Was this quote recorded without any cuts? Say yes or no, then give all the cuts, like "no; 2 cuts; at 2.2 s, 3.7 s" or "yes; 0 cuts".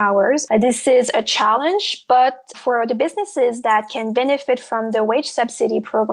no; 1 cut; at 2.5 s